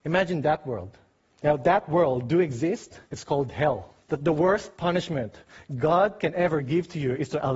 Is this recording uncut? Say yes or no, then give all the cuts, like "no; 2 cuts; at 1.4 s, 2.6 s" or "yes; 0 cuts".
no; 3 cuts; at 1.2 s, 3.1 s, 4.0 s